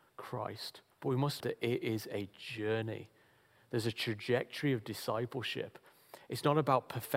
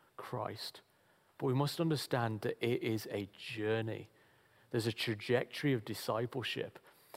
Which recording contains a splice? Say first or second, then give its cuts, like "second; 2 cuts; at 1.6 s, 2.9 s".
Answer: first; 2 cuts; at 0.9 s, 1.4 s